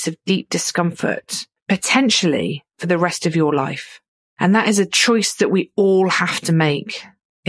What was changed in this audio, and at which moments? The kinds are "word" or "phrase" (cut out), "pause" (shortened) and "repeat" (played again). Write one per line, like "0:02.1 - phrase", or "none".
none